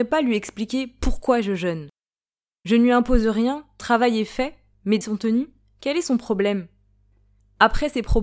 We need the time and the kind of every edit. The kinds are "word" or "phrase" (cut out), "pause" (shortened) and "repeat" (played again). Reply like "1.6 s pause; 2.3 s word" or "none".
3.8 s word; 5.0 s word